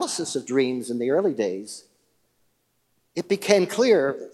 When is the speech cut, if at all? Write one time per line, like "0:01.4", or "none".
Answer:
none